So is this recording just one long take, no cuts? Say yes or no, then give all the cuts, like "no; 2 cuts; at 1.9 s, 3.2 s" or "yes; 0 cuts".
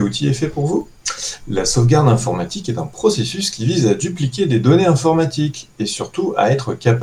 yes; 0 cuts